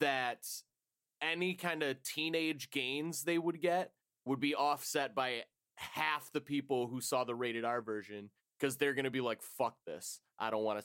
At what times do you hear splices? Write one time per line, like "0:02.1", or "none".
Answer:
none